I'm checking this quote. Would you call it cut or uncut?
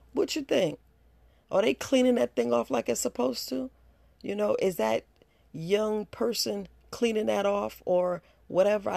uncut